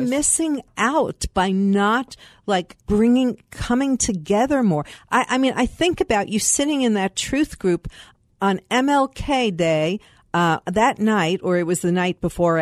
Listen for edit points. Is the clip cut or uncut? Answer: cut